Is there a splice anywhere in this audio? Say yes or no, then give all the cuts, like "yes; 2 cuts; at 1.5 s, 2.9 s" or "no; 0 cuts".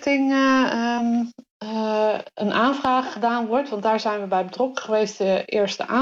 no; 0 cuts